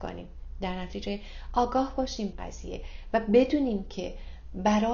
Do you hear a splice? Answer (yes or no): yes